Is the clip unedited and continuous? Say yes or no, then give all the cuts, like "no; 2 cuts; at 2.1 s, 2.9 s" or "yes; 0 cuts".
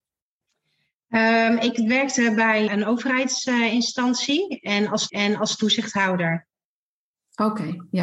no; 2 cuts; at 2.7 s, 5.1 s